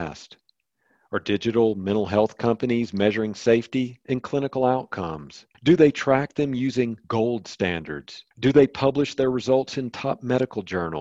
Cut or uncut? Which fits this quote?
cut